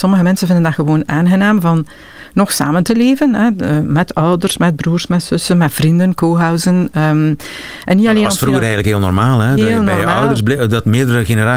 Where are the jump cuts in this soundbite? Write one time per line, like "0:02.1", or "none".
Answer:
none